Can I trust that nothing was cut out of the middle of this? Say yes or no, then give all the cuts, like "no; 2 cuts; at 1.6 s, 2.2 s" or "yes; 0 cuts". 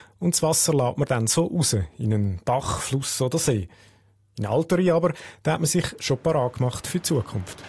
yes; 0 cuts